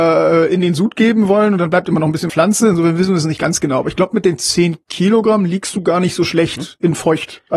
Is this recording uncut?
no; 2 cuts; at 2.3 s, 4.8 s

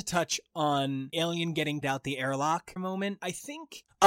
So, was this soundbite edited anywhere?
yes; 3 cuts; at 1.1 s, 1.8 s, 2.8 s

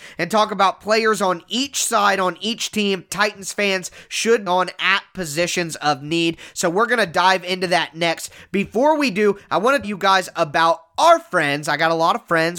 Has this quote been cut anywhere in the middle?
yes; 3 cuts; at 3.1 s, 4.5 s, 9.8 s

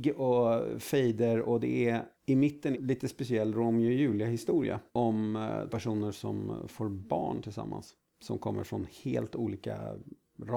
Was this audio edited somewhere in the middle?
yes; 4 cuts; at 2.1 s, 2.7 s, 4.9 s, 5.7 s

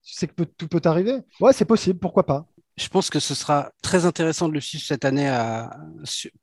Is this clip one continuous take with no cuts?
no; 2 cuts; at 1.3 s, 3.8 s

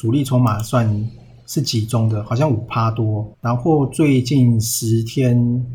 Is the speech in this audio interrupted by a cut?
yes; 1 cut; at 3.3 s

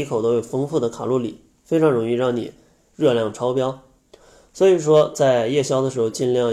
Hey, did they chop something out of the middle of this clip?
no; 0 cuts

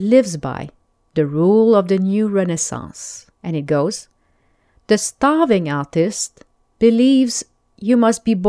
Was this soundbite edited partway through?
yes; 1 cut; at 3.3 s

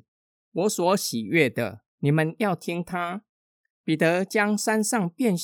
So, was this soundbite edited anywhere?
yes; 1 cut; at 1.9 s

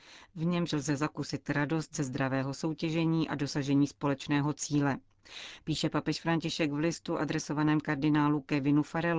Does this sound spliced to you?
no; 0 cuts

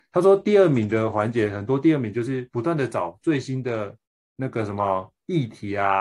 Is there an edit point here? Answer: yes; 1 cut; at 4.0 s

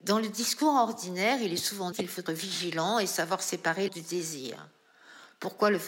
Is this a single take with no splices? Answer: no; 3 cuts; at 1.9 s, 2.3 s, 3.9 s

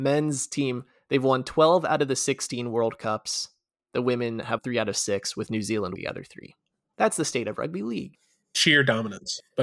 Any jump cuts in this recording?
yes; 2 cuts; at 4.6 s, 6.0 s

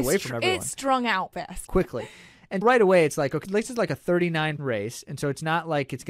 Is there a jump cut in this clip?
yes; 5 cuts; at 1.3 s, 1.7 s, 2.6 s, 3.4 s, 4.6 s

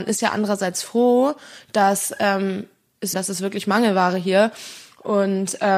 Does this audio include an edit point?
yes; 1 cut; at 3.1 s

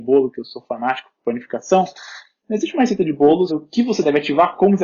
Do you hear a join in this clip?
yes; 1 cut; at 3.5 s

